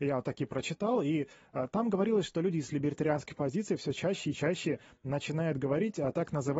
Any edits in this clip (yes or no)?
no